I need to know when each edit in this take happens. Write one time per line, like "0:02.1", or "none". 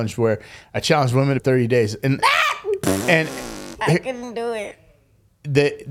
0:01.4
0:03.8